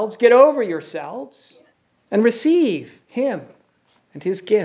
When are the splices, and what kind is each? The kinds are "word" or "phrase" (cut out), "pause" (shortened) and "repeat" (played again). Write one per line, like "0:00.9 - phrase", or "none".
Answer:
0:01.7 - pause